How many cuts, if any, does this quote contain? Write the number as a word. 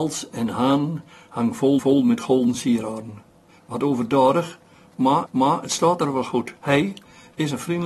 four